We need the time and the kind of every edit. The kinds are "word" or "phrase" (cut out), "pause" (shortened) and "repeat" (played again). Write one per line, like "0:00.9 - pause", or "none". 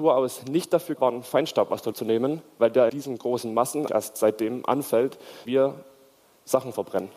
0:01.0 - word
0:01.9 - word
0:02.9 - word
0:03.9 - word
0:05.5 - word